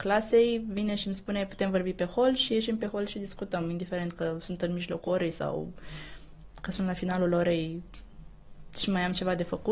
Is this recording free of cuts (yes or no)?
yes